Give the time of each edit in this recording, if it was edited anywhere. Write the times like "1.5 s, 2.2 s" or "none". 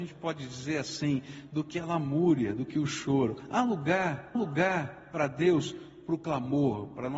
4.4 s

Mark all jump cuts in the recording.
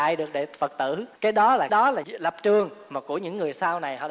1.2 s, 1.7 s, 2.0 s

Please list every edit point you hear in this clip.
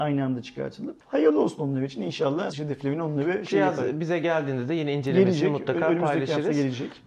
1.0 s, 2.5 s

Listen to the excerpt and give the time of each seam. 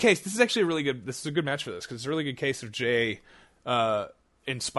none

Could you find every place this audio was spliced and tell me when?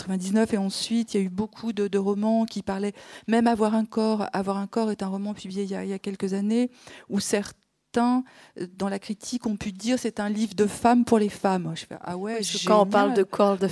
none

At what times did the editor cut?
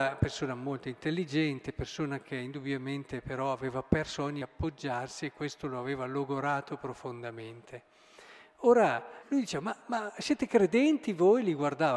4.4 s, 9.2 s, 9.8 s

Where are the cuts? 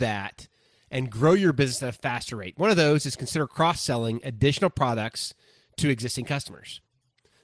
none

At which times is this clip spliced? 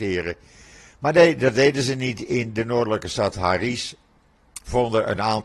none

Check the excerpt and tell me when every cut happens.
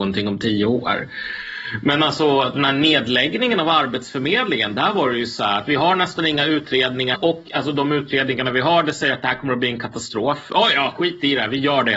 7.1 s

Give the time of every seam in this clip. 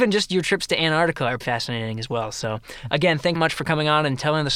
1.4 s, 3.4 s

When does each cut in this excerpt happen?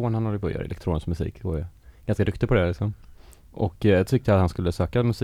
none

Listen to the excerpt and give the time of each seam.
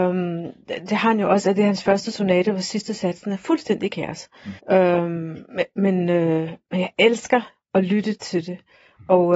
4.6 s, 5.5 s, 7.6 s

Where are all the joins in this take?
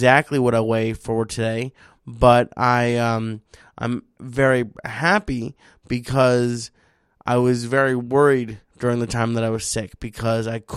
none

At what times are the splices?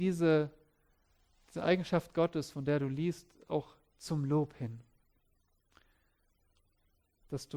none

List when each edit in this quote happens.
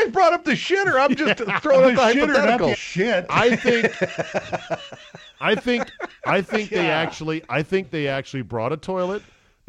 2.7 s

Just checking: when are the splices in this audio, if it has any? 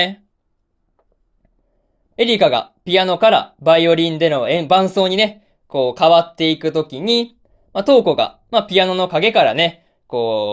2.1 s

